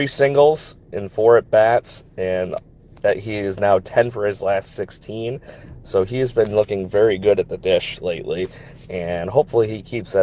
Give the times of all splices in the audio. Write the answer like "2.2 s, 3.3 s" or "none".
none